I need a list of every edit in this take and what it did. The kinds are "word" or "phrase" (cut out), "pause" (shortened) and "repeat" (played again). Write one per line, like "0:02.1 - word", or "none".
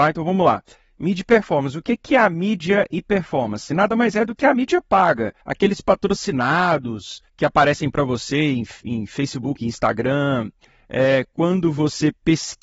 0:05.4 - pause
0:07.3 - pause